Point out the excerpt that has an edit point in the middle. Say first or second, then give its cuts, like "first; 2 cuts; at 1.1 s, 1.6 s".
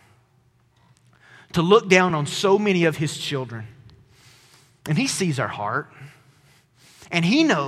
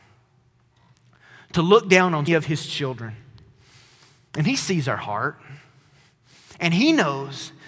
second; 1 cut; at 2.3 s